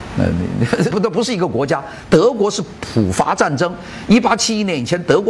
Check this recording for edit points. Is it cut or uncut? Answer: cut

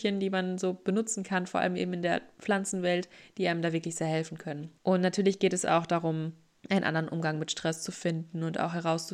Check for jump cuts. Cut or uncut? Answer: uncut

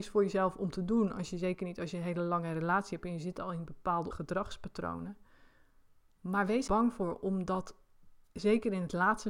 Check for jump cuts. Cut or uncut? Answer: cut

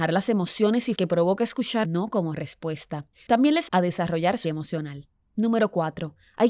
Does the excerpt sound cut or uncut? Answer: cut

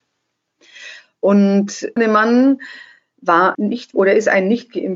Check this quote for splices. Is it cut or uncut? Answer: cut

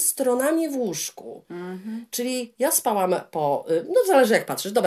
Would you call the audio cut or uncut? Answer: uncut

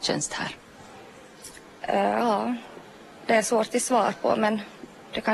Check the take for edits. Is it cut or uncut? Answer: uncut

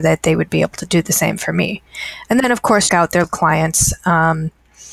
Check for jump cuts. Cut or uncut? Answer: cut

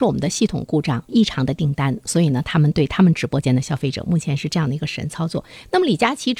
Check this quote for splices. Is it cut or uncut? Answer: cut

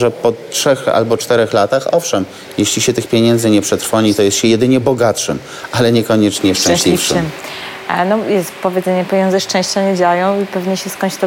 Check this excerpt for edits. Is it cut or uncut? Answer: uncut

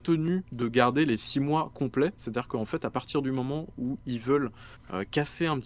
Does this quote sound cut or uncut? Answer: uncut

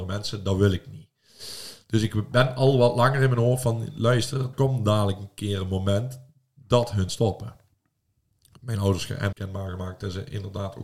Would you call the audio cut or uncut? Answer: cut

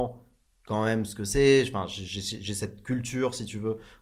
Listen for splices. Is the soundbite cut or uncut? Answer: uncut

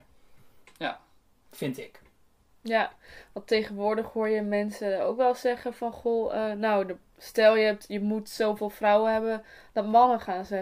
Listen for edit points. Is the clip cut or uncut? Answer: uncut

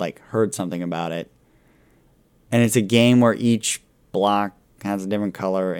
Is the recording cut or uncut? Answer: uncut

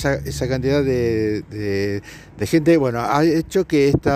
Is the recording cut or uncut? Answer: uncut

